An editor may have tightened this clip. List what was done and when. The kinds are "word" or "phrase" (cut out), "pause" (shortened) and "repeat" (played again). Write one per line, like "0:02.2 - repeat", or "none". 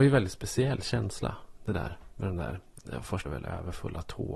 0:03.2 - word